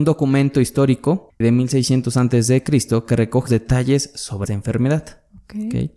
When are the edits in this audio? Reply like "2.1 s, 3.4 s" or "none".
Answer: 1.4 s, 3.5 s, 4.5 s